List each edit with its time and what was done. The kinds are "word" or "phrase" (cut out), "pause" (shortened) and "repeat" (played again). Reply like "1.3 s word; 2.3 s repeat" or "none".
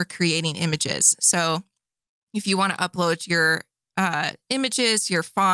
none